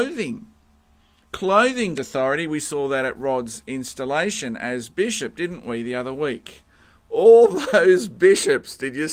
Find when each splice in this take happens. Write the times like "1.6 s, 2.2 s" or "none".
2.0 s